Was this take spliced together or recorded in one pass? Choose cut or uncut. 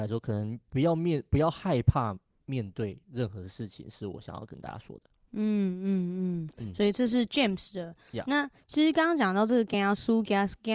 uncut